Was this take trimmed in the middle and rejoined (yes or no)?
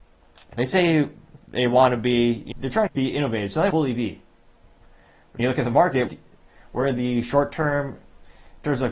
yes